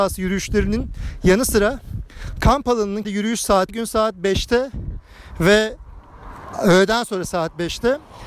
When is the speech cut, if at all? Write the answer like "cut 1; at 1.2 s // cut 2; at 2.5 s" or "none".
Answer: cut 1; at 3.0 s // cut 2; at 3.7 s